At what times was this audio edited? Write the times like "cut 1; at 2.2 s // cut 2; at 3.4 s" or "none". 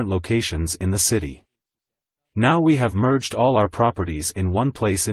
none